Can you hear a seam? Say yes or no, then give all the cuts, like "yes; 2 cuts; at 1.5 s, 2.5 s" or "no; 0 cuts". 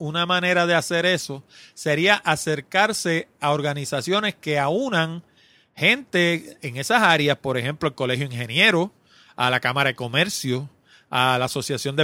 no; 0 cuts